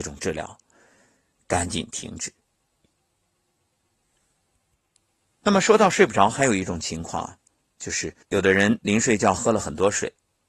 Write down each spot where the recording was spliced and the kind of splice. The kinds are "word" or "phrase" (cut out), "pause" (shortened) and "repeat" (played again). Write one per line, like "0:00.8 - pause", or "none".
0:08.2 - pause